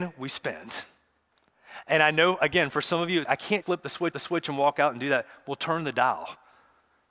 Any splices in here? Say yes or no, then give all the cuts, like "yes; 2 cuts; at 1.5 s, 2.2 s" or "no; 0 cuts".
yes; 3 cuts; at 3.3 s, 3.6 s, 4.1 s